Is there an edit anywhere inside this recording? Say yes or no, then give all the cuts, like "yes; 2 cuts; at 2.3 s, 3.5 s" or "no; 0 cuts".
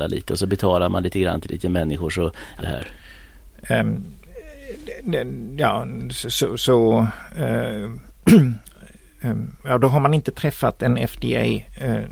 yes; 2 cuts; at 2.6 s, 9.6 s